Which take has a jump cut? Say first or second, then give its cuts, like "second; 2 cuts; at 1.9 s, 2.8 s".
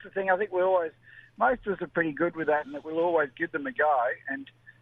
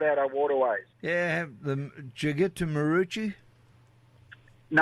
second; 1 cut; at 0.9 s